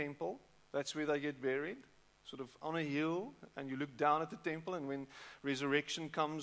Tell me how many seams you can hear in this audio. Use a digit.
0